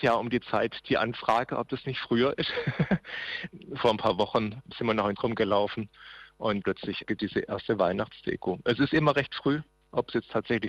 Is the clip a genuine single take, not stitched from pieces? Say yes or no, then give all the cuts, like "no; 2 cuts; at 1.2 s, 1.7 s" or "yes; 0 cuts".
no; 3 cuts; at 5.2 s, 6.6 s, 7.2 s